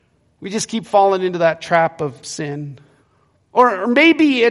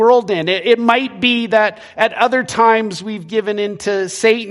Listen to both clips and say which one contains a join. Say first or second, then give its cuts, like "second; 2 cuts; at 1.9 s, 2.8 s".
first; 2 cuts; at 2.2 s, 3.0 s